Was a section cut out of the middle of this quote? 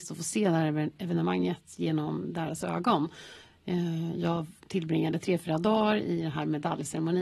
no; 0 cuts

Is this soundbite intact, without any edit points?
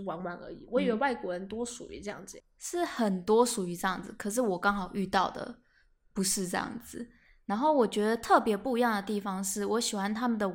no; 1 cut; at 2.4 s

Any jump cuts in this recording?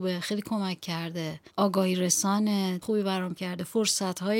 yes; 3 cuts; at 1.5 s, 2.8 s, 3.3 s

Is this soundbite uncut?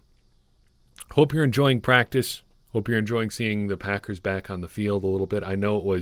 yes; 0 cuts

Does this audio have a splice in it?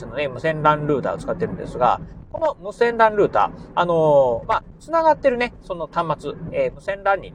no; 0 cuts

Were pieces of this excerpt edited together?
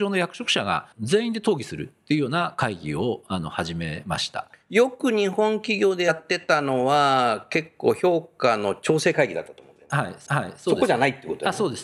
yes; 2 cuts; at 0.9 s, 10.3 s

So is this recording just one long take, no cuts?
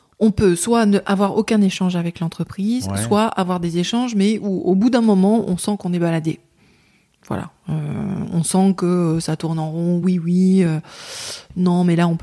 yes; 0 cuts

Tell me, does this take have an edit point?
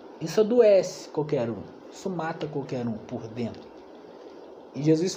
no; 0 cuts

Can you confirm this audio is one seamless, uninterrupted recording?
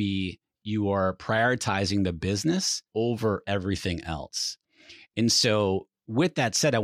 no; 1 cut; at 2.9 s

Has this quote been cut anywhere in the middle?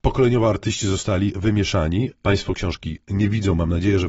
no; 0 cuts

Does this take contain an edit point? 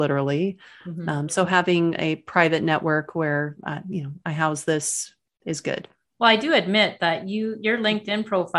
no; 0 cuts

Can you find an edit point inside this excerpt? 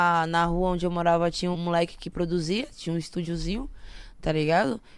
yes; 1 cut; at 1.5 s

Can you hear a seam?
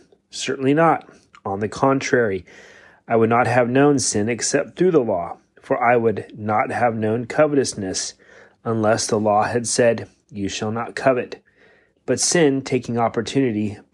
no; 0 cuts

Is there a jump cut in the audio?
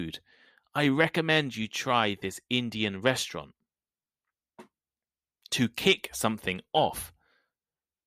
no; 0 cuts

